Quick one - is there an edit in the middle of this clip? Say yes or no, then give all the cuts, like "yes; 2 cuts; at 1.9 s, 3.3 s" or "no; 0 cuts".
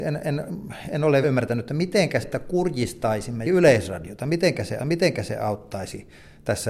yes; 4 cuts; at 1.2 s, 2.2 s, 3.5 s, 4.8 s